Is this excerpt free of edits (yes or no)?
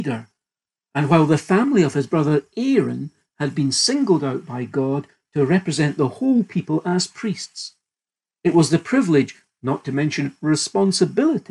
yes